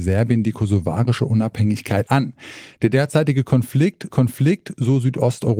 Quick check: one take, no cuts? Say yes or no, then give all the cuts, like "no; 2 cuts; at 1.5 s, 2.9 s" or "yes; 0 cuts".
no; 2 cuts; at 2.1 s, 4.1 s